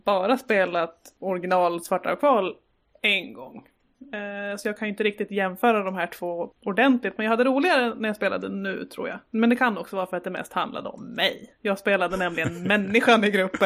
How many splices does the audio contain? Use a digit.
0